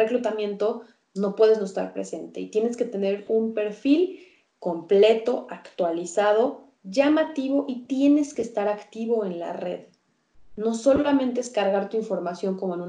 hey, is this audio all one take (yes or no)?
yes